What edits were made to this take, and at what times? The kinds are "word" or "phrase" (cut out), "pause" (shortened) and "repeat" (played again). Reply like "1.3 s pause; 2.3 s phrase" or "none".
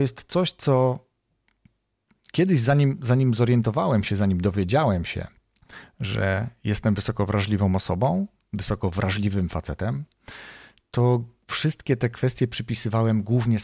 none